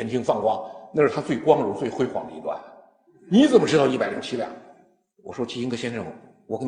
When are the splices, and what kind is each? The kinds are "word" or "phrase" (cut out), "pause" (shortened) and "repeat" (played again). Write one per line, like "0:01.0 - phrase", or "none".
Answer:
none